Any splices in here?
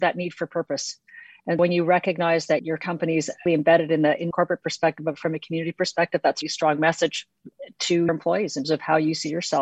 yes; 7 cuts; at 1.6 s, 2.6 s, 3.5 s, 4.3 s, 6.4 s, 8.1 s, 8.6 s

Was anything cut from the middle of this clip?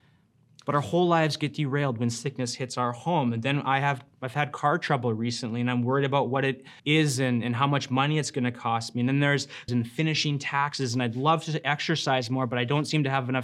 yes; 2 cuts; at 6.8 s, 9.7 s

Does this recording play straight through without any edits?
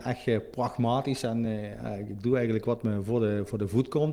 yes; 0 cuts

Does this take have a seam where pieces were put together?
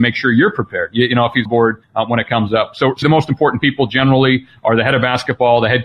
yes; 3 cuts; at 1.5 s, 1.8 s, 3.0 s

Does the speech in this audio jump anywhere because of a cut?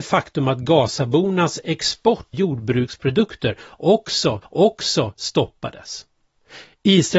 yes; 2 cuts; at 2.3 s, 4.4 s

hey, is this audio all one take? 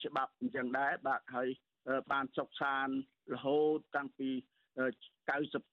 yes; 0 cuts

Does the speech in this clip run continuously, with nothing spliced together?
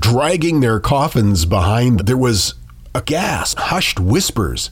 no; 3 cuts; at 2.0 s, 3.0 s, 3.6 s

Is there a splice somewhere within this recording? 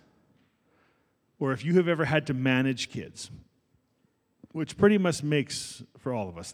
no; 0 cuts

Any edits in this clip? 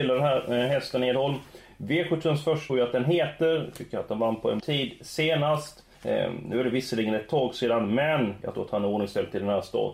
yes; 3 cuts; at 2.7 s, 4.6 s, 5.9 s

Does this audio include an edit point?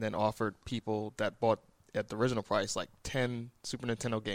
no; 0 cuts

